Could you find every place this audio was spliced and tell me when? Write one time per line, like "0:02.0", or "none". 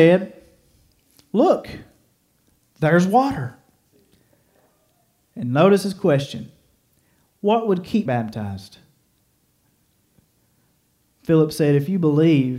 0:08.1